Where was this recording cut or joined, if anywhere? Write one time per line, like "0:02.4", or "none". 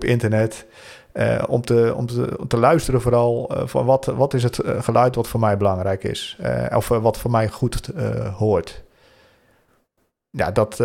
none